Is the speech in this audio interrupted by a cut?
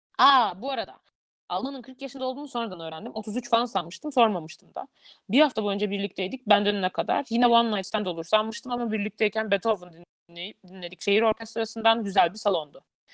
no; 0 cuts

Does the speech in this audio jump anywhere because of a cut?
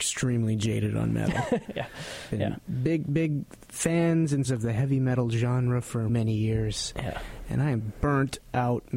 yes; 3 cuts; at 1.7 s, 4.5 s, 6.1 s

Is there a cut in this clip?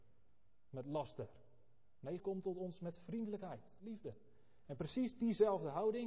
yes; 2 cuts; at 2.2 s, 3.8 s

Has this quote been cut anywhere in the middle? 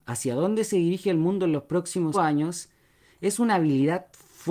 yes; 1 cut; at 2.1 s

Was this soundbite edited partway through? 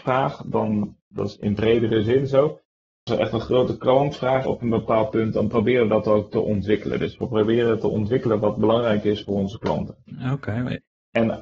yes; 2 cuts; at 3.1 s, 4.5 s

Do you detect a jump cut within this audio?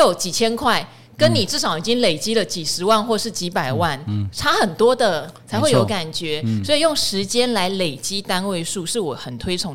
no; 0 cuts

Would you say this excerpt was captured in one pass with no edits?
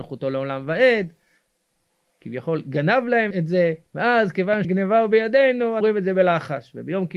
no; 4 cuts; at 3.3 s, 3.9 s, 4.6 s, 5.8 s

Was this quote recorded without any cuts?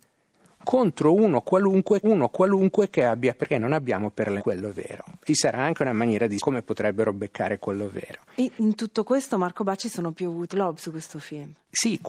no; 6 cuts; at 2.0 s, 3.4 s, 4.4 s, 5.3 s, 6.4 s, 10.5 s

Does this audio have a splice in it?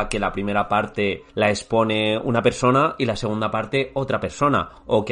yes; 1 cut; at 1.3 s

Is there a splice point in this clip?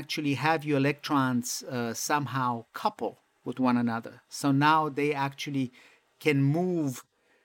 no; 0 cuts

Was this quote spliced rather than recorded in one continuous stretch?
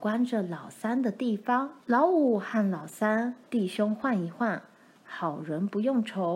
yes; 2 cuts; at 1.8 s, 3.4 s

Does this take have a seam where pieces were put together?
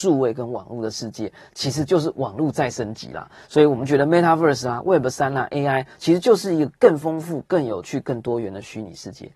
no; 0 cuts

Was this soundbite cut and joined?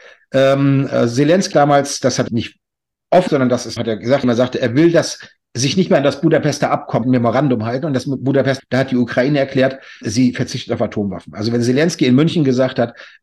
yes; 8 cuts; at 1.5 s, 2.3 s, 3.3 s, 3.8 s, 4.2 s, 7.0 s, 8.6 s, 10.0 s

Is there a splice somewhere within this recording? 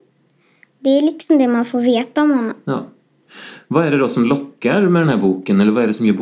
no; 0 cuts

